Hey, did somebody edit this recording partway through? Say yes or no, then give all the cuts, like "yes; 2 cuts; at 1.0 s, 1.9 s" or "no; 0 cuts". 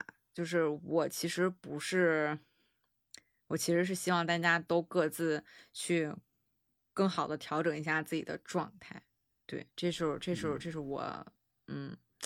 yes; 1 cut; at 9.7 s